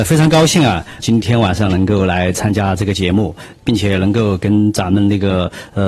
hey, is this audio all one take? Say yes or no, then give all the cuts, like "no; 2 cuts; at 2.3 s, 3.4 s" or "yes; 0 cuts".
no; 1 cut; at 1.0 s